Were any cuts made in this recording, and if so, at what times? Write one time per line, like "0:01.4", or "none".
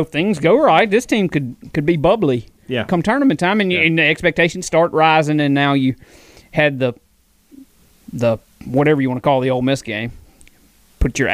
none